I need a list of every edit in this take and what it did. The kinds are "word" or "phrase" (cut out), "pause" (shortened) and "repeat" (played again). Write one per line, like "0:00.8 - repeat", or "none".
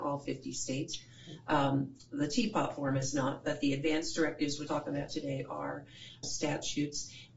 0:04.7 - word
0:06.2 - word